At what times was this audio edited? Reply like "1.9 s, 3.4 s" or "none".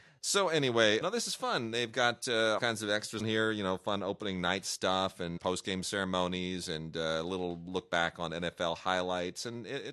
1.0 s, 2.6 s, 3.2 s, 5.4 s